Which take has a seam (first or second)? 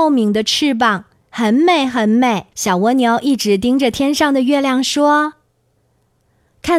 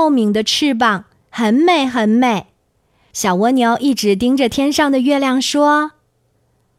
first